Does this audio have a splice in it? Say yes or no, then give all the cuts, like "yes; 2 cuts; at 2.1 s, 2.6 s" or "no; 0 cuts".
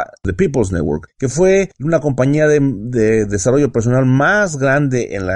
no; 0 cuts